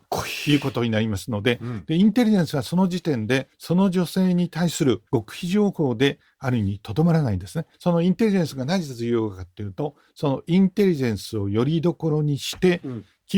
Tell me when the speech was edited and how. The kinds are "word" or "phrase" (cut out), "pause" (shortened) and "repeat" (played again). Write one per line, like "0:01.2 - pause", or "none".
0:03.5 - pause
0:05.1 - pause
0:07.7 - pause